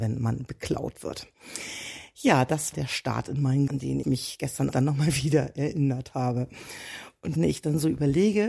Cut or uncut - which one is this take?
cut